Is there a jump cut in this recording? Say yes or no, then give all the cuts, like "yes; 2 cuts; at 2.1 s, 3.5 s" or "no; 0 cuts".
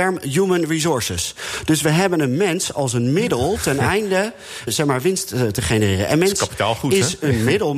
yes; 1 cut; at 4.7 s